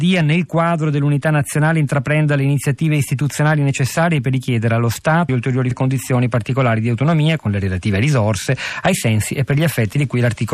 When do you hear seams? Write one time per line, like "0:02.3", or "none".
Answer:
0:05.3
0:05.7